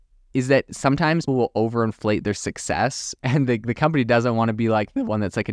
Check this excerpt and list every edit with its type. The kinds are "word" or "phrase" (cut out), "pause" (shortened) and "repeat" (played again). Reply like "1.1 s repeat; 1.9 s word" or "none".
1.3 s word